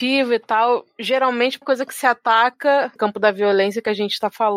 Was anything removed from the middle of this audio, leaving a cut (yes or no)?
yes